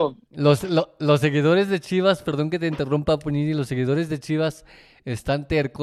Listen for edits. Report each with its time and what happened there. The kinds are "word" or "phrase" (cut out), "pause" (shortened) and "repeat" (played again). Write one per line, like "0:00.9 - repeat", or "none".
none